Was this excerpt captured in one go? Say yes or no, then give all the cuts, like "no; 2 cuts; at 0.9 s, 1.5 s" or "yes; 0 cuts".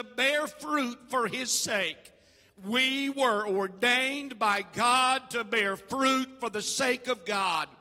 yes; 0 cuts